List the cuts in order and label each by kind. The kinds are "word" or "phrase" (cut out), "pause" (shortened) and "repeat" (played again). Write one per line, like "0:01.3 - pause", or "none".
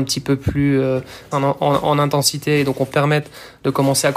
0:01.3 - word
0:02.9 - word